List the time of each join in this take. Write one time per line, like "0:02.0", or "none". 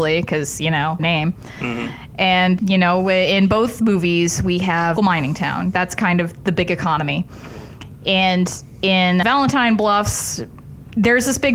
0:01.0
0:02.6
0:05.0
0:09.2